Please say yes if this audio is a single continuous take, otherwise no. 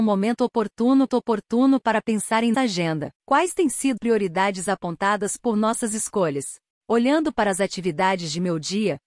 no